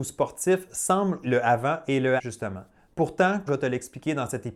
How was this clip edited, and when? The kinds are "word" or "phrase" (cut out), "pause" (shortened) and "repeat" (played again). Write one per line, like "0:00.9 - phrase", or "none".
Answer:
0:01.2 - word
0:02.2 - word
0:03.5 - word